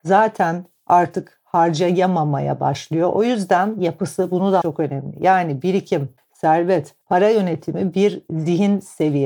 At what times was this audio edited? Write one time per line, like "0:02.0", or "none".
0:03.8
0:04.6
0:07.0